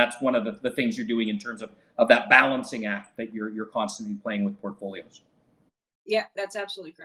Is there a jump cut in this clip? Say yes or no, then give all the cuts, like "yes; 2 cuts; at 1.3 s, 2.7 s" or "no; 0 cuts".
no; 0 cuts